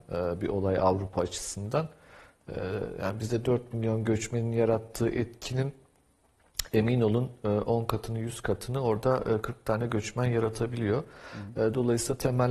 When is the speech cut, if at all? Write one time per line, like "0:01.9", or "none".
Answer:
none